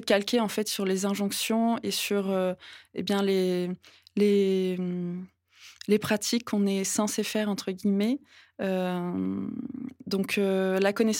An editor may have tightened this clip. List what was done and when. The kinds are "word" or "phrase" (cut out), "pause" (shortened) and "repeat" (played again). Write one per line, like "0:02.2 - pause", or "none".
none